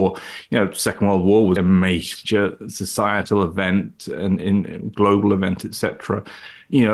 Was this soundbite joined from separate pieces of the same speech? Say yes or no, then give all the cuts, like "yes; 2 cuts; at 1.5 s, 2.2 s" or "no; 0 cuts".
yes; 1 cut; at 1.6 s